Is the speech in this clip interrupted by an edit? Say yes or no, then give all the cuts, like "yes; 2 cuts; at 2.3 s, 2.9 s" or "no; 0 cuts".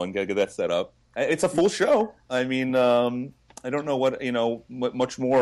no; 0 cuts